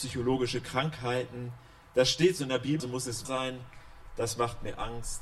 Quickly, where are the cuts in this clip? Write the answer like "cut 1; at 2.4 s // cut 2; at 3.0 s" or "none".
cut 1; at 2.8 s // cut 2; at 3.2 s